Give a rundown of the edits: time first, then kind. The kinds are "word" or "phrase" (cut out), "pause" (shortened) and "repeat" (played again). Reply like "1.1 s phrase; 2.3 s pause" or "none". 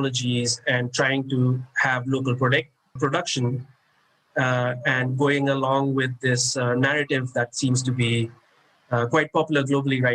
3.0 s word